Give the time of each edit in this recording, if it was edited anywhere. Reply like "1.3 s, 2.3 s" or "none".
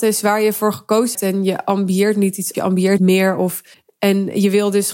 1.1 s, 2.5 s, 3.0 s, 3.7 s